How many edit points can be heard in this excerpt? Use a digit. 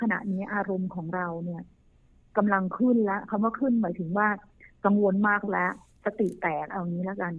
0